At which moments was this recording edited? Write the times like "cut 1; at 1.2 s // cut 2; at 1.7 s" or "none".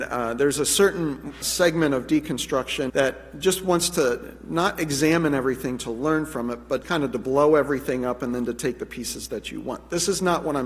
cut 1; at 1.4 s // cut 2; at 2.9 s // cut 3; at 6.8 s